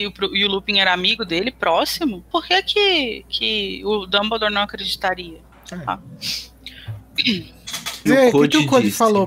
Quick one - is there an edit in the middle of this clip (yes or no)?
yes